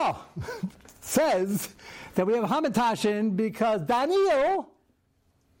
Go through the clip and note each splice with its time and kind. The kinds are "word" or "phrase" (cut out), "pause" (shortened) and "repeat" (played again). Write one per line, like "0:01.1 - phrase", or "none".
none